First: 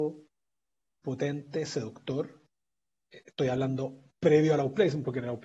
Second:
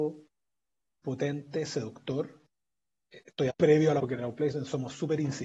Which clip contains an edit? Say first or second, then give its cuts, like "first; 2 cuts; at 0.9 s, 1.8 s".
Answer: second; 2 cuts; at 3.5 s, 4.0 s